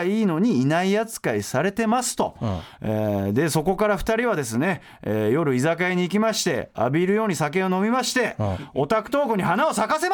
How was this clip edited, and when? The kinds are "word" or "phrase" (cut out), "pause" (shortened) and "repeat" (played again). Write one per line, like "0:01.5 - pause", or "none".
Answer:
none